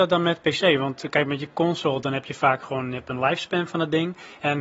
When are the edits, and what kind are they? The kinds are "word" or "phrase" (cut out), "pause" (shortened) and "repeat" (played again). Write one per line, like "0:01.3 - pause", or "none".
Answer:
none